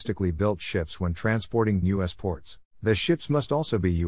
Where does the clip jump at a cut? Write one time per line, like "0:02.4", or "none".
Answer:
0:01.8
0:02.7